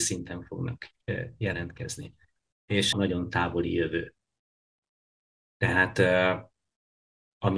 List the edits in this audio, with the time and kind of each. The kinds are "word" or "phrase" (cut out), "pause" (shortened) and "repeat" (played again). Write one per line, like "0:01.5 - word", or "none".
0:02.9 - phrase